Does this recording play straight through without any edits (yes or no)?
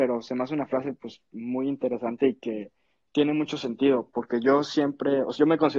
yes